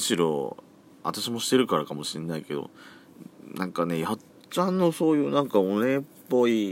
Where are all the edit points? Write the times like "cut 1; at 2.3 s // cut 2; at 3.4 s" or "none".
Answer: cut 1; at 4.3 s